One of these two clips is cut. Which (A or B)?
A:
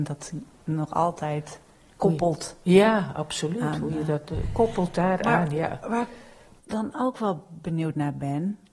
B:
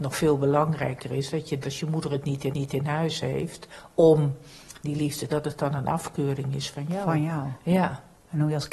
B